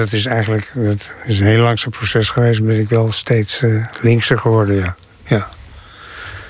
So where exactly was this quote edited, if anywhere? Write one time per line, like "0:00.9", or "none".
none